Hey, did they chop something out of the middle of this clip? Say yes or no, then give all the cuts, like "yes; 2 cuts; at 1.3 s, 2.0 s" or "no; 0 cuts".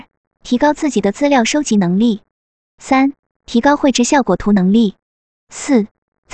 no; 0 cuts